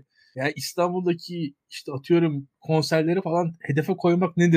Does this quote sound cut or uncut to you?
uncut